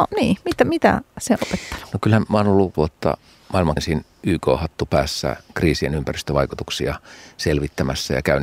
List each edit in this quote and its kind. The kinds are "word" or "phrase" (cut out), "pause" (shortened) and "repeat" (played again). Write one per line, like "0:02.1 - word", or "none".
0:01.4 - word
0:02.7 - word
0:03.8 - word